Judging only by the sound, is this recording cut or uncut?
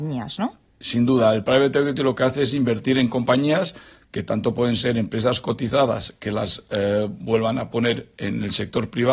uncut